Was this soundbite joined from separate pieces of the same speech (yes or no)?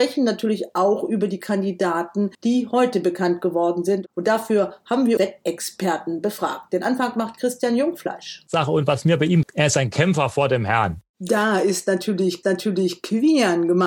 yes